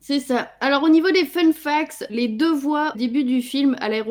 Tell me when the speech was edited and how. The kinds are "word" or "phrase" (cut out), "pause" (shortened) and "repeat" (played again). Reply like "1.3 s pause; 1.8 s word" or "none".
2.1 s word; 2.9 s word